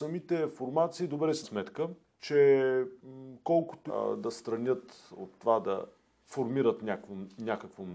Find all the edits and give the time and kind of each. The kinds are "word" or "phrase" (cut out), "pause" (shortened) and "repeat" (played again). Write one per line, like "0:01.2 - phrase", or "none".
0:01.4 - word
0:02.1 - pause
0:03.9 - word